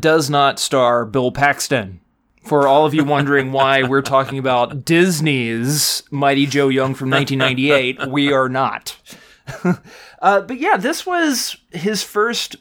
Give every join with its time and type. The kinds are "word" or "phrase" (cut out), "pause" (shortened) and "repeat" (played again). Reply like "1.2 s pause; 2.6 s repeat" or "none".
none